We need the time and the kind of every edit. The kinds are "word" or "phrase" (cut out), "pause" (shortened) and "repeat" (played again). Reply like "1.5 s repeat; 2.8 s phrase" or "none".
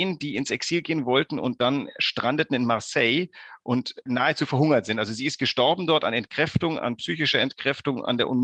4.1 s word